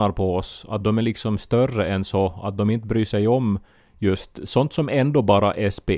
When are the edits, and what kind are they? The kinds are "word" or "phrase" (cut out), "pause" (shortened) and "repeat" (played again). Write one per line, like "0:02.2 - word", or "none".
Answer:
none